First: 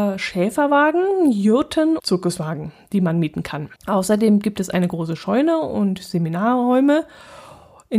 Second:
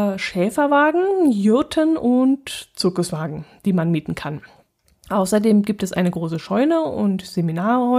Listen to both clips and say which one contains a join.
first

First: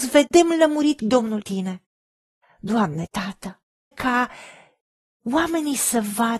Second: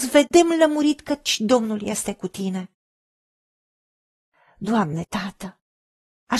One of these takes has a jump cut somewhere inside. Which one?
first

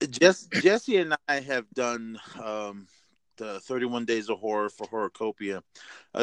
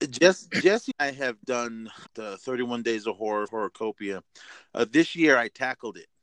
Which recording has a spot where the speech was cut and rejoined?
second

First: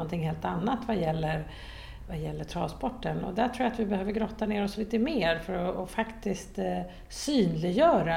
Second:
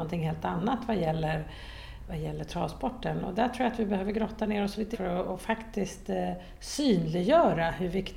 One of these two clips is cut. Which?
second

